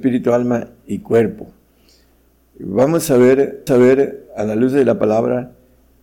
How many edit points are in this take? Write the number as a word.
one